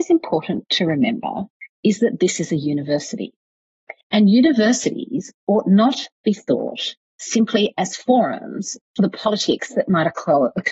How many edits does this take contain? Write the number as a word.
two